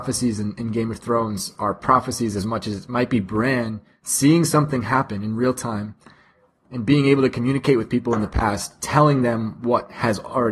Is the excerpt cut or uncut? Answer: uncut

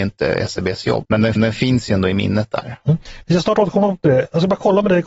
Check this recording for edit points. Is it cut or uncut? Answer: cut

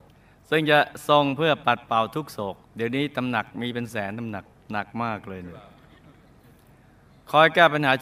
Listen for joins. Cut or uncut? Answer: cut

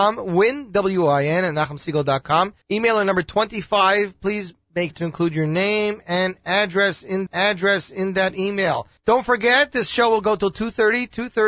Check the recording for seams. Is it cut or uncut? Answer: cut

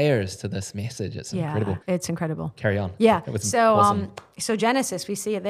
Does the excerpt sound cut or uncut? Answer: cut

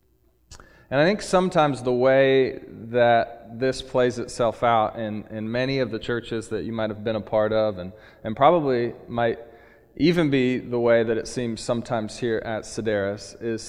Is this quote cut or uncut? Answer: uncut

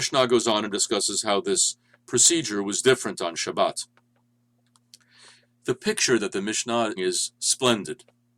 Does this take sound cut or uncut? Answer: cut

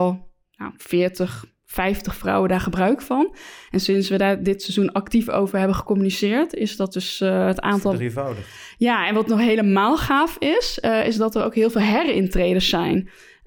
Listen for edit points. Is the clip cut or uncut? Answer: uncut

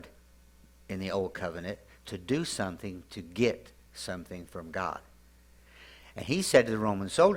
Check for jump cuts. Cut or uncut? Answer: uncut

